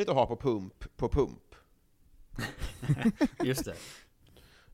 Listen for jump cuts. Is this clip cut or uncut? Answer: uncut